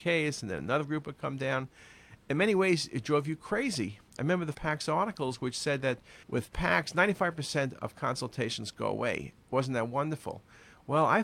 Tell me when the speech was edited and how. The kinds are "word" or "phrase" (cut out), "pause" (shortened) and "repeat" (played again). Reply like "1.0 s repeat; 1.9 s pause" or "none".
4.5 s word; 6.2 s pause; 9.4 s pause